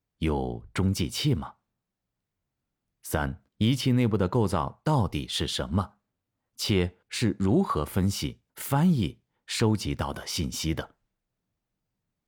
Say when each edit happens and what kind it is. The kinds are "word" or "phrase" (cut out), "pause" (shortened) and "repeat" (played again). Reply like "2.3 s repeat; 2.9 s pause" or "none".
3.5 s pause; 7.0 s pause; 8.5 s pause